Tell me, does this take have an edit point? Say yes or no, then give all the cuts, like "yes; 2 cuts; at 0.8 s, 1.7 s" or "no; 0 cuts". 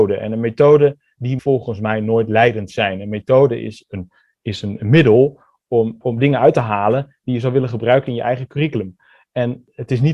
yes; 2 cuts; at 1.4 s, 6.0 s